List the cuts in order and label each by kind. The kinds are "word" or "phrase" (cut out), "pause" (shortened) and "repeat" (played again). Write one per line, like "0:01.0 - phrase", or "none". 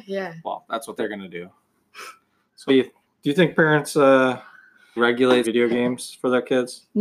0:01.0 - word
0:02.7 - word
0:05.0 - word
0:05.4 - phrase